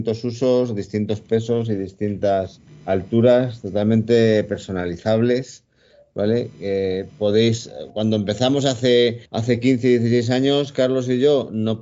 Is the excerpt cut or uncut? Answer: cut